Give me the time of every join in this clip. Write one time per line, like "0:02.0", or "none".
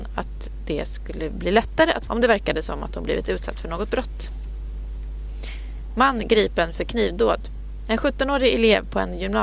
0:02.1